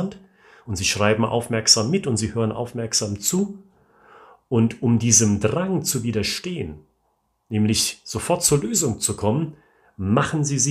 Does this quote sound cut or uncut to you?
uncut